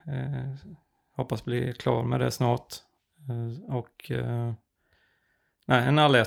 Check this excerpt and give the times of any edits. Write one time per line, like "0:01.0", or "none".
none